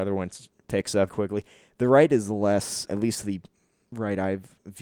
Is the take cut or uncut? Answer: cut